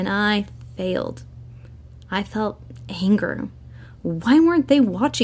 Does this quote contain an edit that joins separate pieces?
no; 0 cuts

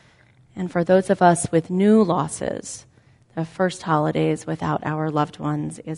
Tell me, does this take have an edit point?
no; 0 cuts

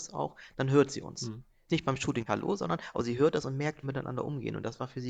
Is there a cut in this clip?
yes; 3 cuts; at 1.7 s, 2.3 s, 3.8 s

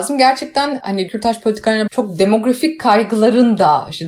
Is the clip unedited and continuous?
no; 2 cuts; at 1.1 s, 1.9 s

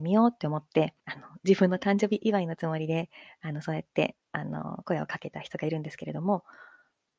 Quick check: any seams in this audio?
yes; 1 cut; at 1.0 s

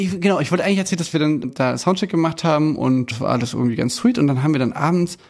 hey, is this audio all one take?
yes; 0 cuts

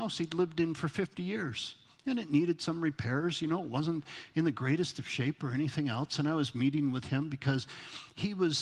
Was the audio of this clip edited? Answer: no; 0 cuts

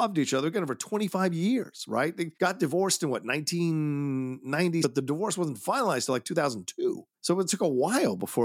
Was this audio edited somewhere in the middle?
yes; 3 cuts; at 2.3 s, 4.8 s, 7.2 s

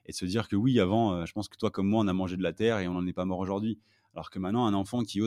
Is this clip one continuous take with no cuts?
yes; 0 cuts

